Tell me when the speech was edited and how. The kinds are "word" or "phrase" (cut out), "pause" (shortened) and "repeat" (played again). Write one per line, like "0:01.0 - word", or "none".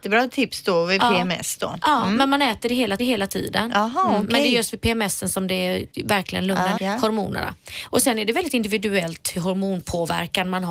0:03.0 - repeat
0:05.9 - pause
0:06.8 - word
0:09.4 - word